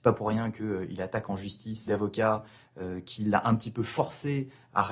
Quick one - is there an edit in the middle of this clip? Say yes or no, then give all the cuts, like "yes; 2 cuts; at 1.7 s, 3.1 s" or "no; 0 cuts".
yes; 1 cut; at 1.9 s